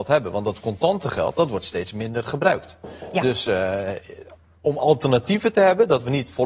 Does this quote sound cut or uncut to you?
uncut